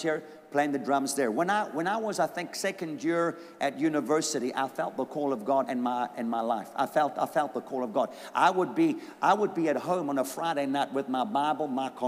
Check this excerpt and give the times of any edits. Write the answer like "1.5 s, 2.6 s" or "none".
5.6 s

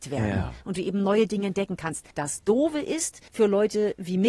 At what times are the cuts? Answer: 2.1 s, 3.3 s

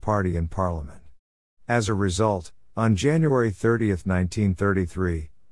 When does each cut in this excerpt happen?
none

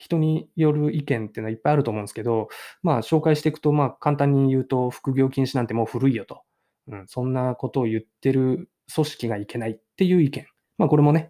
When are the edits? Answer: none

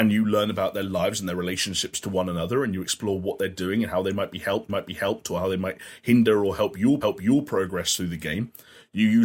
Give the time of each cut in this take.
4.7 s, 7.0 s

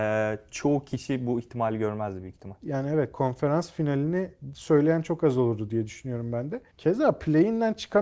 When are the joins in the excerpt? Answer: 6.7 s

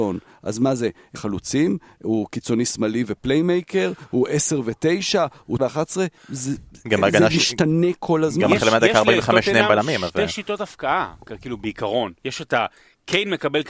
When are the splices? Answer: 1.2 s, 5.6 s, 6.2 s, 12.2 s

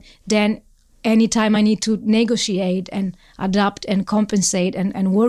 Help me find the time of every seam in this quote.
none

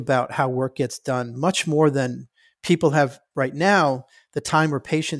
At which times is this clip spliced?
none

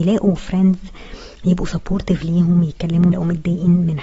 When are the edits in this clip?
3.1 s

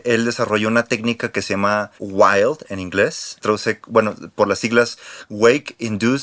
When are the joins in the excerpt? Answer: 1.9 s

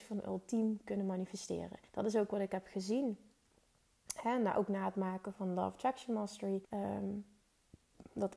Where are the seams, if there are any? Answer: 1.9 s, 6.6 s

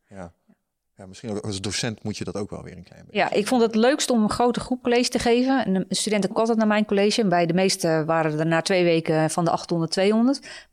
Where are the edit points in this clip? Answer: 4.8 s, 6.3 s

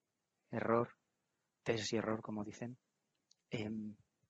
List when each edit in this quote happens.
none

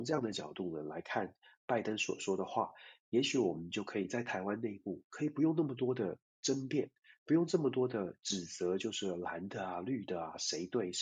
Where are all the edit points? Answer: none

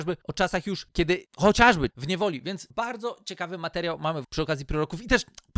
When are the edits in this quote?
1.9 s, 4.2 s

